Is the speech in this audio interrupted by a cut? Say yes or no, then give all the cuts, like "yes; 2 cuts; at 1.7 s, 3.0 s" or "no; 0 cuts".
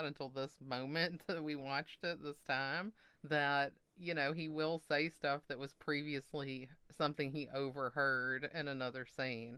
yes; 2 cuts; at 3.0 s, 6.8 s